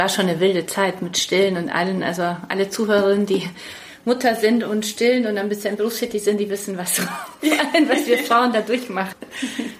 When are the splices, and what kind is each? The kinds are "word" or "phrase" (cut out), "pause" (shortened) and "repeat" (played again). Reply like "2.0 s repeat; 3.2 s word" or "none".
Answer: none